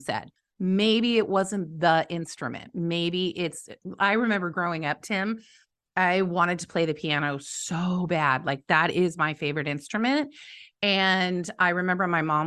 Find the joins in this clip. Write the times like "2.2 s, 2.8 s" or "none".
none